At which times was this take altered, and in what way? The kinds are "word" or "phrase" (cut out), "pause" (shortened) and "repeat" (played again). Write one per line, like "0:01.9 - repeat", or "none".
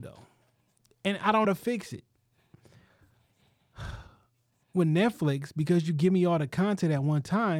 0:01.4 - phrase

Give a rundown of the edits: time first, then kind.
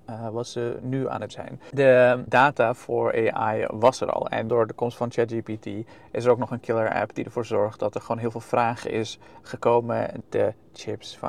0:01.3 - word
0:04.5 - phrase
0:10.2 - word

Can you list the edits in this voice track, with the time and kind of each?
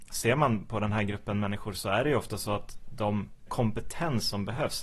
0:03.5 - word

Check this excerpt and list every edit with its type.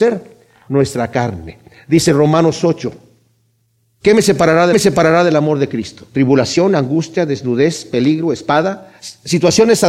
0:04.7 - repeat

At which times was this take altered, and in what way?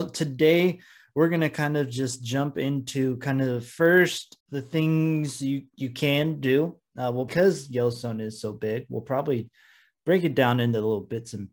0:04.4 - pause
0:07.3 - word

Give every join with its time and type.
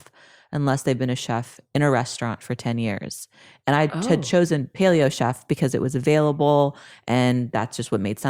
none

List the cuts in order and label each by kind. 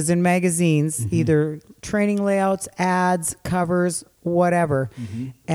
0:04.1 - pause

